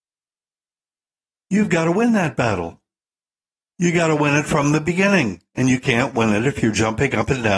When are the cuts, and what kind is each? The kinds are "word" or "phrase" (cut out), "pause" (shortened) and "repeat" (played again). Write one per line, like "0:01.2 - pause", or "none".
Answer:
none